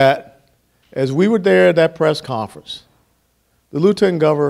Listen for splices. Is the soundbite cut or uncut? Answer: uncut